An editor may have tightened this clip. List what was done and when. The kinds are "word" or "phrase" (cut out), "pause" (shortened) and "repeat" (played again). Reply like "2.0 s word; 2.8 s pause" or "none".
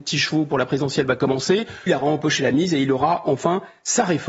1.9 s word